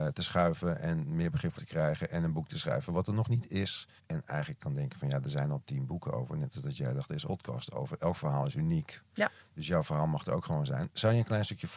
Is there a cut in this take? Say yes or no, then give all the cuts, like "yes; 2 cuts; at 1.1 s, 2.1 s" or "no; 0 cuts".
yes; 4 cuts; at 1.6 s, 4.0 s, 4.6 s, 7.2 s